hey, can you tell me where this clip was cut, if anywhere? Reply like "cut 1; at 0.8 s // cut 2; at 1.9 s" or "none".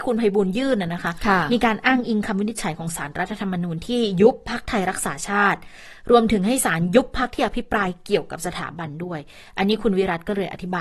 none